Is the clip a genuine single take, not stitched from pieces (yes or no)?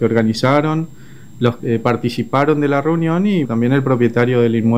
no